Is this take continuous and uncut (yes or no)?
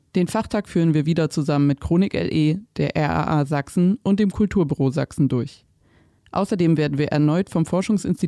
yes